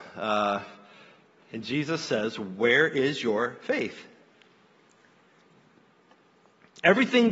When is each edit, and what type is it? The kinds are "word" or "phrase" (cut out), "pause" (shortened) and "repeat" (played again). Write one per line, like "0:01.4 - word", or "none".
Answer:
none